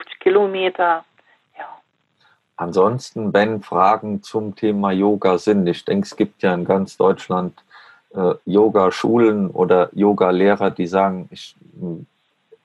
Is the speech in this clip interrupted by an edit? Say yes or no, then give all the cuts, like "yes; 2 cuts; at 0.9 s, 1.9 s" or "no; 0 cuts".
no; 0 cuts